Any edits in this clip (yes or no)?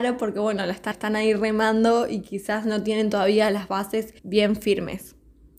yes